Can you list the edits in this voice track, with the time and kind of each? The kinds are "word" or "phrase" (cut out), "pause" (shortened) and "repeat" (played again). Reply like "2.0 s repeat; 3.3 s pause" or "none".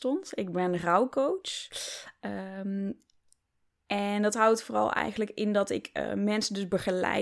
none